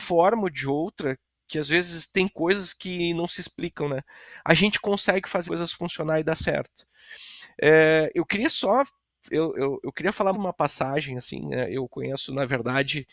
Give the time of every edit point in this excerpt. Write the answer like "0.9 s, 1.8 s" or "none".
5.5 s, 9.5 s, 10.3 s